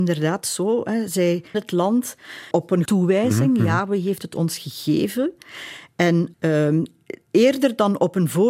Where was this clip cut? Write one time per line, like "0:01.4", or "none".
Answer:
0:01.5
0:02.5
0:02.9
0:06.3

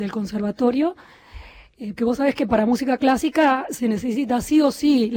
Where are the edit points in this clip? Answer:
0:02.0

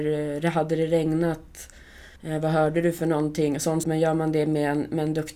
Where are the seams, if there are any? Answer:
0:02.2
0:03.8

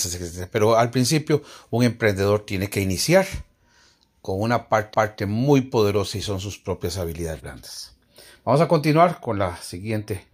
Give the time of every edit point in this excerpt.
0:04.9

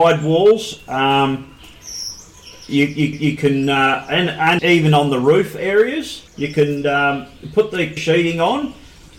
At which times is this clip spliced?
0:03.1
0:04.6
0:06.3
0:08.0

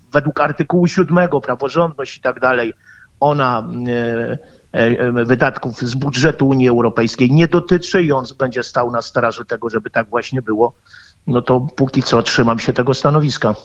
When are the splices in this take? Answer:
none

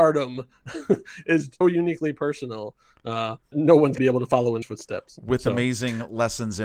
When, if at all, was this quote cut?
0:01.6
0:03.5
0:04.0
0:04.6

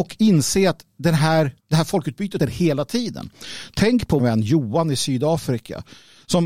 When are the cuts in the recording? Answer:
0:01.6
0:02.4
0:04.2

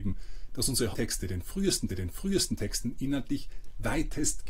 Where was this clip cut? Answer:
0:00.9
0:01.9

